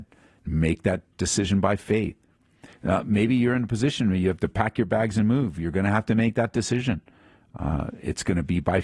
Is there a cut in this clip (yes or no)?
no